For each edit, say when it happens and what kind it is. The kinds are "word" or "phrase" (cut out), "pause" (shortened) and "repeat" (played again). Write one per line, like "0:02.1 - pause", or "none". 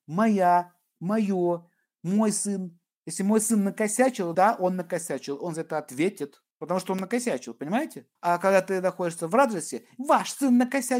0:04.3 - word
0:06.5 - pause
0:08.2 - pause